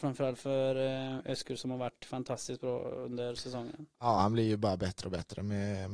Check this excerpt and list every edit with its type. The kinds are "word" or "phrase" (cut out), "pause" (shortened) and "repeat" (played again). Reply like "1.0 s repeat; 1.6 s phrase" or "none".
none